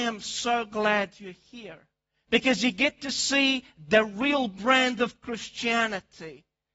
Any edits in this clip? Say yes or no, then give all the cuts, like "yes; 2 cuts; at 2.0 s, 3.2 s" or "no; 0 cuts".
no; 0 cuts